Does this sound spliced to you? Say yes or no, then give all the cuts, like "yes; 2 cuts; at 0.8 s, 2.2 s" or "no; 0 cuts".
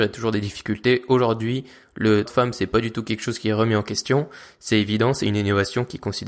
yes; 1 cut; at 2.3 s